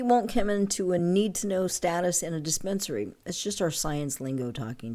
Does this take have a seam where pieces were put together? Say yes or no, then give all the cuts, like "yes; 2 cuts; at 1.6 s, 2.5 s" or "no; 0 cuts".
no; 0 cuts